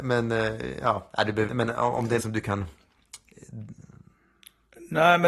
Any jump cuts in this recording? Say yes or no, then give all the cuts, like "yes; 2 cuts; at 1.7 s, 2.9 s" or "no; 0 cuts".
yes; 2 cuts; at 1.5 s, 2.2 s